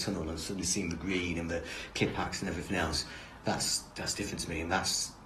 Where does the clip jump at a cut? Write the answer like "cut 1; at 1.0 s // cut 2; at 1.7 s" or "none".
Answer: none